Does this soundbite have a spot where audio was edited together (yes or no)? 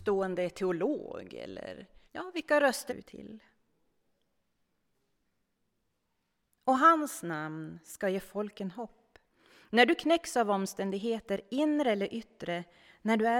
yes